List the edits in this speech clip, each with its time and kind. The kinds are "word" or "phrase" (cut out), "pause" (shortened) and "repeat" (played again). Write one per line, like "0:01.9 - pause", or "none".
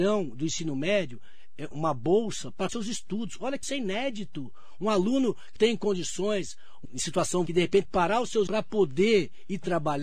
0:01.7 - word
0:02.7 - word
0:03.6 - word
0:05.6 - word
0:06.8 - word
0:07.5 - word
0:07.8 - word
0:08.5 - word